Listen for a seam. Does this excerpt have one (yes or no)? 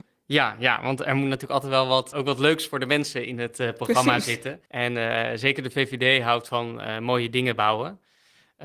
yes